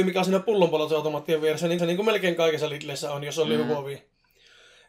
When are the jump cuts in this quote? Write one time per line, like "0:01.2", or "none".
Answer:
0:01.8